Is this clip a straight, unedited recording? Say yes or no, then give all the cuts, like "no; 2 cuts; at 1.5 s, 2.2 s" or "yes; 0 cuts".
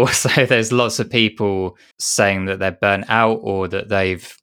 no; 1 cut; at 1.9 s